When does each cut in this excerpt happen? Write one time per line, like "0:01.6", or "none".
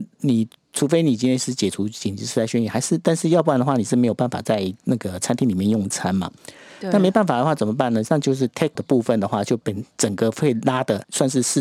0:08.8